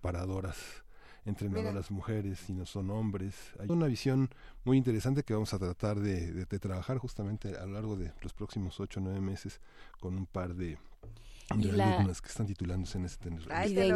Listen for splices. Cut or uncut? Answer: cut